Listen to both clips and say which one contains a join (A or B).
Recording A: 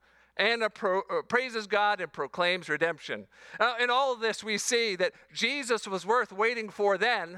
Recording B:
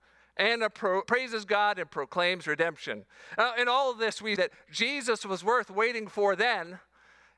B